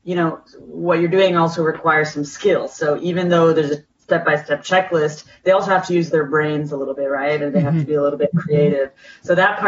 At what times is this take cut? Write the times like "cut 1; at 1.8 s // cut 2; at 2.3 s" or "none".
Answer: none